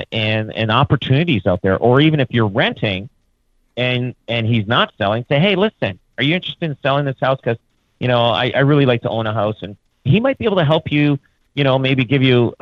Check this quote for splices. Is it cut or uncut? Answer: uncut